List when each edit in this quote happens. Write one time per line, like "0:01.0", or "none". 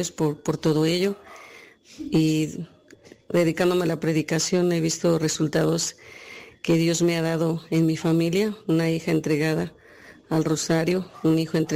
none